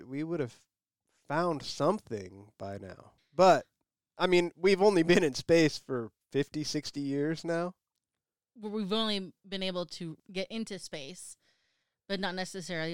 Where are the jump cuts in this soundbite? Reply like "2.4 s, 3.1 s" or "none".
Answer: 3.2 s